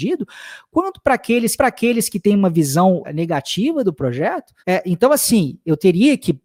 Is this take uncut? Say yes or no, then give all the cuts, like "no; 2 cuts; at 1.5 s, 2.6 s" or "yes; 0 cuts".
no; 3 cuts; at 1.6 s, 3.0 s, 4.6 s